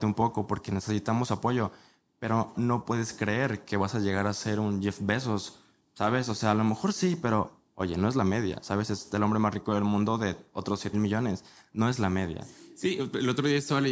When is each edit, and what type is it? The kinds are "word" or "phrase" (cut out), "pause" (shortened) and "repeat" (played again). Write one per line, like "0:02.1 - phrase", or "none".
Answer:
0:02.5 - word
0:10.9 - word